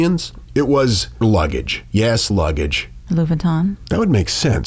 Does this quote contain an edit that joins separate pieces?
yes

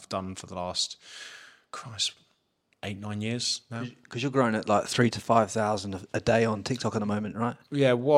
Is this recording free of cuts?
yes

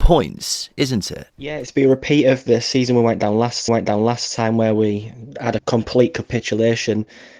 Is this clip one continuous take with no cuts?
no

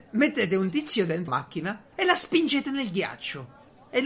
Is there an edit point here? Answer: yes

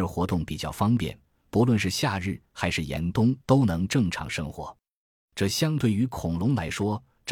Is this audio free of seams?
no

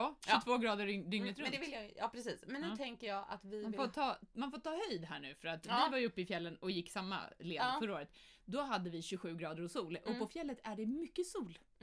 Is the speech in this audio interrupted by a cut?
no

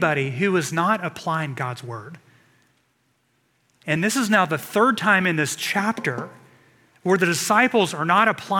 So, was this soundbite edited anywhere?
no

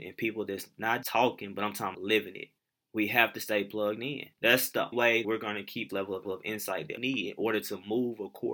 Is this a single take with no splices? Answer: no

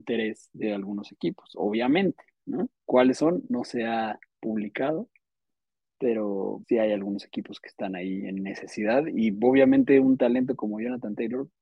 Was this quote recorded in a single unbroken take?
no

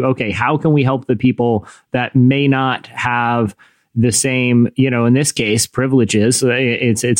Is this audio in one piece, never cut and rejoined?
yes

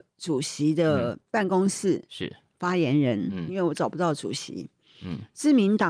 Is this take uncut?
no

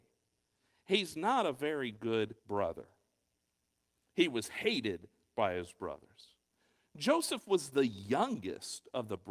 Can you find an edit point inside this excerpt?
yes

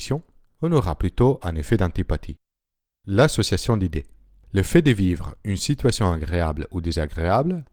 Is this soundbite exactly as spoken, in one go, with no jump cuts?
yes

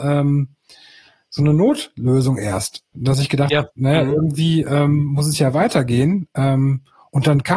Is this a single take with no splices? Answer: yes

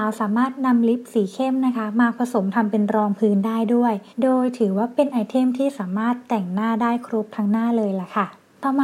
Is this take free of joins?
no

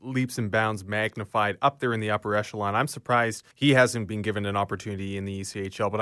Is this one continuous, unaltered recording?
no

